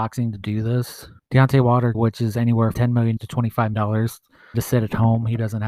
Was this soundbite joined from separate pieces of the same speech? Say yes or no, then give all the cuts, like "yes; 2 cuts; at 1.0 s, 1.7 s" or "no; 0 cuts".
yes; 6 cuts; at 1.2 s, 1.9 s, 2.7 s, 3.2 s, 3.7 s, 4.5 s